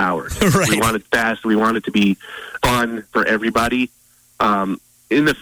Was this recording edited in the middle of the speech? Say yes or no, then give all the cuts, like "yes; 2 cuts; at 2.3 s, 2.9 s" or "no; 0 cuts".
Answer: yes; 2 cuts; at 1.0 s, 2.6 s